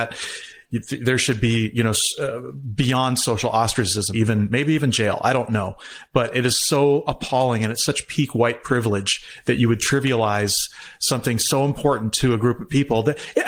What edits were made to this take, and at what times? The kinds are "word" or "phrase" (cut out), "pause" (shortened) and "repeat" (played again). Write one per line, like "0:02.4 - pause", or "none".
0:04.1 - word